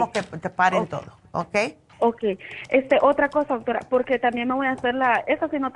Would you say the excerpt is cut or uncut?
cut